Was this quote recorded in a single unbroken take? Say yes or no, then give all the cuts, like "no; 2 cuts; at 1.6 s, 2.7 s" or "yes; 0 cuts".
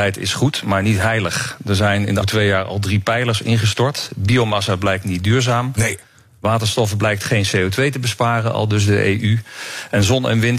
no; 1 cut; at 2.2 s